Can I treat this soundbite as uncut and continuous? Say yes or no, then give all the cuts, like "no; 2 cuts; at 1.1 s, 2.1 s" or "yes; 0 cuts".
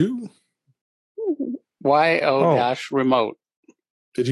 no; 1 cut; at 2.2 s